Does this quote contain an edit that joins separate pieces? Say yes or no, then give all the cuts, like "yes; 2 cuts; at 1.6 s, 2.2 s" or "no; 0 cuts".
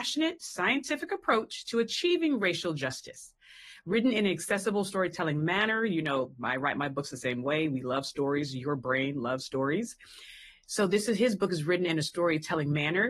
no; 0 cuts